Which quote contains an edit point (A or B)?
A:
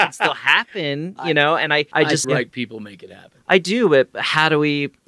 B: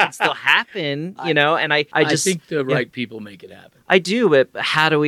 A